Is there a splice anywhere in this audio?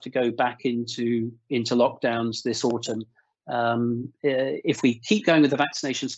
no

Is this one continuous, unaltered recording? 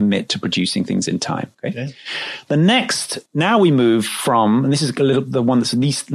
no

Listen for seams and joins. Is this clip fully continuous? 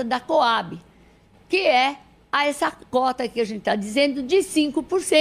yes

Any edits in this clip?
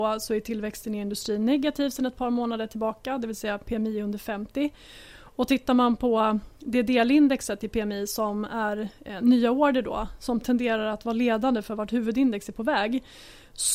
no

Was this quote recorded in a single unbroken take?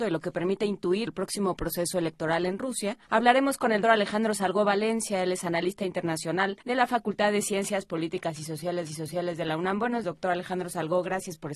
no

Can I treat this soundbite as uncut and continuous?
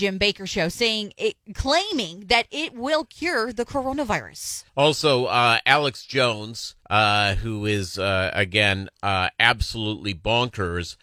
no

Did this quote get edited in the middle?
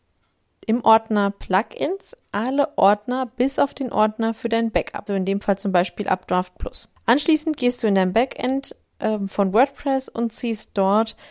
yes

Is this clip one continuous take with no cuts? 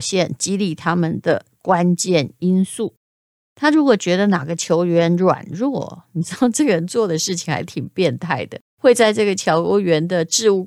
no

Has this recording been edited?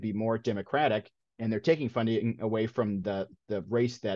no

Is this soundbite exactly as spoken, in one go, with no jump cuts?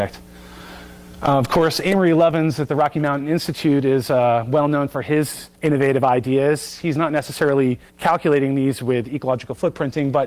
no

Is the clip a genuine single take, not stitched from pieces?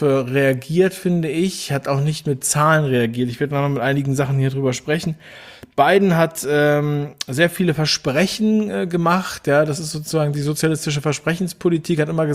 yes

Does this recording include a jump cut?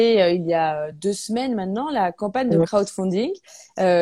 no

